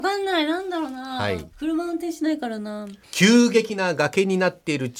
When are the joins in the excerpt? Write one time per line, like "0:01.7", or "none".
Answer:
0:01.5
0:03.0